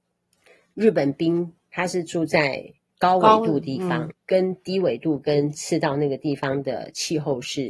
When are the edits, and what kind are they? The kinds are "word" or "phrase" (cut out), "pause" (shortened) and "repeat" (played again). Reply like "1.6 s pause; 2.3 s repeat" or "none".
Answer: 4.1 s word